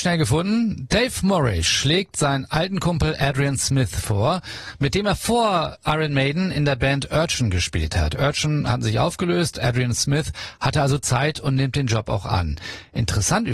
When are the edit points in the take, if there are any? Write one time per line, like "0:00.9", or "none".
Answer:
none